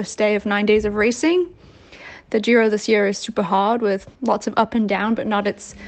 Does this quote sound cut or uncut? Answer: cut